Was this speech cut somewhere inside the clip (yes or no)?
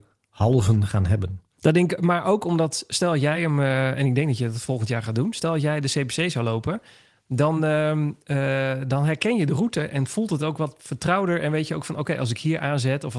no